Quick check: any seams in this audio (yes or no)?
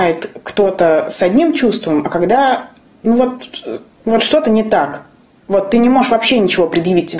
no